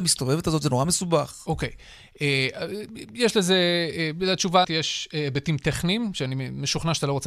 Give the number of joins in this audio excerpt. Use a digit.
1